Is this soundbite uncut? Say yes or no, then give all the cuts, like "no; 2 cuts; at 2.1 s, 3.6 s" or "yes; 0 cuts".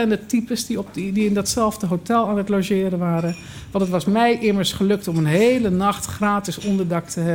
yes; 0 cuts